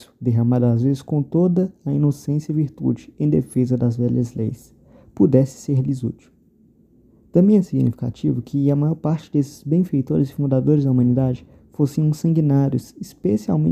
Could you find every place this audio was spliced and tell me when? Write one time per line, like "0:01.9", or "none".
none